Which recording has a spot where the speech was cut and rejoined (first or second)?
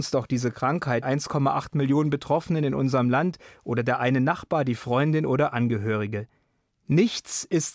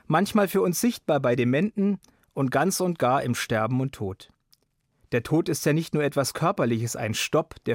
first